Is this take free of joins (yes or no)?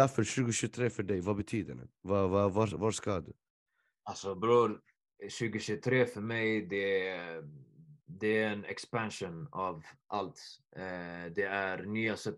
yes